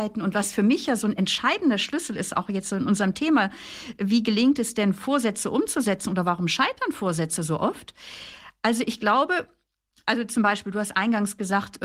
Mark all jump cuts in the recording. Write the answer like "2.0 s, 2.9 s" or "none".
none